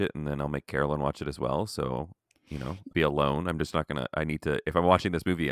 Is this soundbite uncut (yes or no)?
no